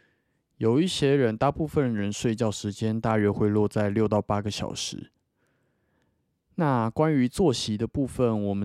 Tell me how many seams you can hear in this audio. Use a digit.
0